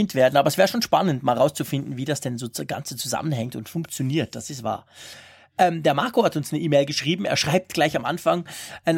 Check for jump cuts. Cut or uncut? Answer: uncut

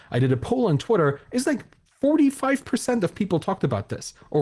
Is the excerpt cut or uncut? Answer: uncut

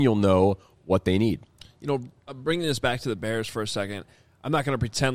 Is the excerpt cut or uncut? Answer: uncut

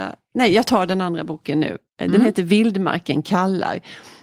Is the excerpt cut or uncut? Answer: cut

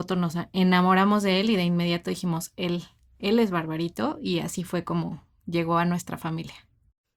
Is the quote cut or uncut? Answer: uncut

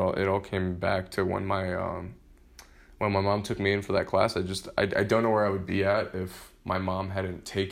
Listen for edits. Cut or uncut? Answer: uncut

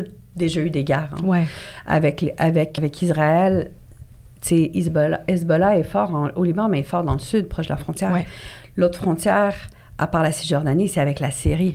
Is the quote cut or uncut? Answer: cut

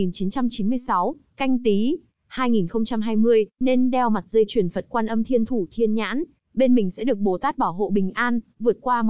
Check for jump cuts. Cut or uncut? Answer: cut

